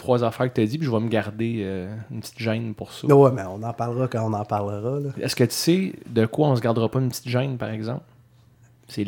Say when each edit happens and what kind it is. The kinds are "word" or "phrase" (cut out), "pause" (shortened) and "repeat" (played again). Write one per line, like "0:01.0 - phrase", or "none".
none